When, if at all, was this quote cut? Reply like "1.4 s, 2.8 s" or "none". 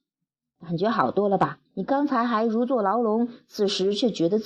1.7 s